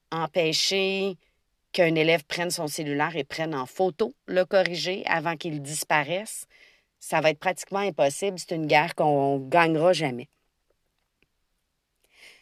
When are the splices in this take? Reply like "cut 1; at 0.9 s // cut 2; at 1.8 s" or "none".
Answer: none